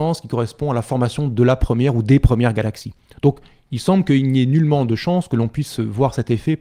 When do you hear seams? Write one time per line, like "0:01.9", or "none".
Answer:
none